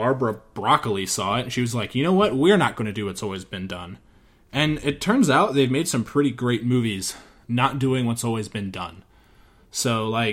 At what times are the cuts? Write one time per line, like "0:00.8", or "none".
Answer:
none